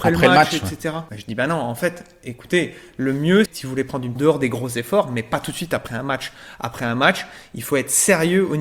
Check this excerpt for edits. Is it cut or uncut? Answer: cut